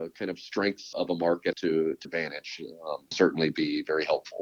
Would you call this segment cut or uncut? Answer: cut